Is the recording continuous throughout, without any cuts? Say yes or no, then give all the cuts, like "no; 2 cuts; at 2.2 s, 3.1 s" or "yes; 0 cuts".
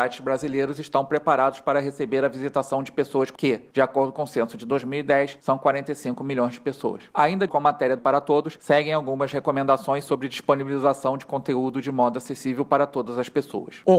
no; 3 cuts; at 3.4 s, 7.5 s, 8.0 s